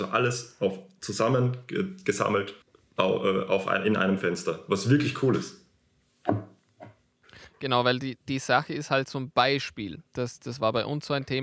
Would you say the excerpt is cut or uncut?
cut